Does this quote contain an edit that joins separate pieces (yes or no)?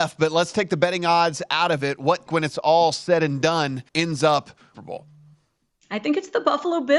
yes